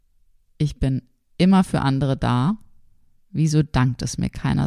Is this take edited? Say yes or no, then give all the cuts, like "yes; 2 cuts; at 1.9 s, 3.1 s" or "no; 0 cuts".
no; 0 cuts